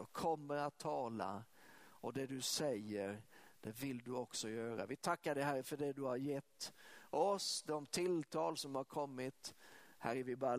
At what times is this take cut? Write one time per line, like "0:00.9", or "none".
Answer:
none